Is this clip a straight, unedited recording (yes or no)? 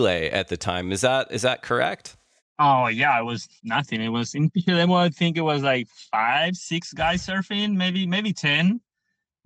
no